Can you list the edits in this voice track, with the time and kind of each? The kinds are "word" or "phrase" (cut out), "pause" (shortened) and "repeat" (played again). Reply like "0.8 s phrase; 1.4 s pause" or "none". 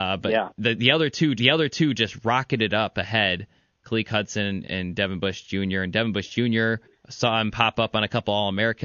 1.4 s repeat; 4.6 s word; 6.8 s pause